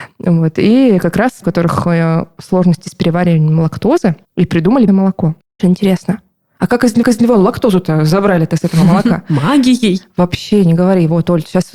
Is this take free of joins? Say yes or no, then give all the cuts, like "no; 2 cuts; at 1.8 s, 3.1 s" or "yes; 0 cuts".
no; 5 cuts; at 1.4 s, 4.2 s, 4.9 s, 5.6 s, 7.0 s